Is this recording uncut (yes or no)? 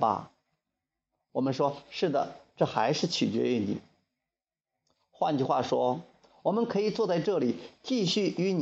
yes